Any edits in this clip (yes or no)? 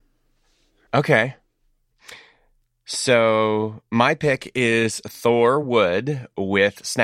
no